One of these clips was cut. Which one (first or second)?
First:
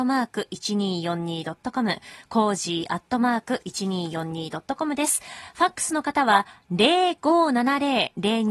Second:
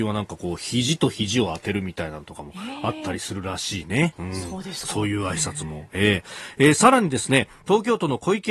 second